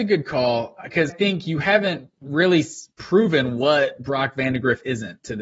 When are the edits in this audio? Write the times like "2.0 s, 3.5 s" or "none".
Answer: 1.1 s, 2.1 s